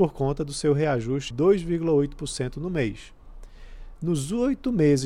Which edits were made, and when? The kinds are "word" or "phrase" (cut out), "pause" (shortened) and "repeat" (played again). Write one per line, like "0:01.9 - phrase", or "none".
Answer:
0:01.3 - word